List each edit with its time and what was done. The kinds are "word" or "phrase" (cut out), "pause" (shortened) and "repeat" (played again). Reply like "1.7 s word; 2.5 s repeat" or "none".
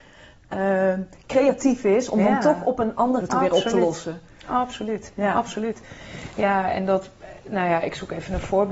3.2 s word